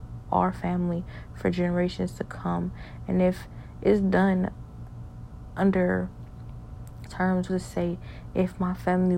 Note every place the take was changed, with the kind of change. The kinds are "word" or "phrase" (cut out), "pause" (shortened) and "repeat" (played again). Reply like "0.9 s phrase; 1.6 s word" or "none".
7.1 s word; 7.5 s word